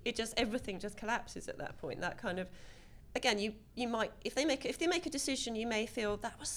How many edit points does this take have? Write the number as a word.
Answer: zero